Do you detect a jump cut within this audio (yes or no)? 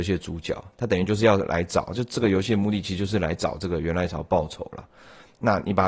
no